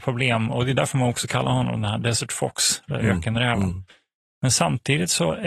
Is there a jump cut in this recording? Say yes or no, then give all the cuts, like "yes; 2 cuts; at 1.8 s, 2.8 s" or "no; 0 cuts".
no; 0 cuts